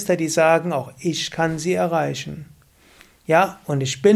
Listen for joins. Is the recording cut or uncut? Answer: uncut